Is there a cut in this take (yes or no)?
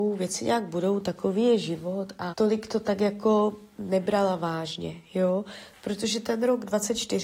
yes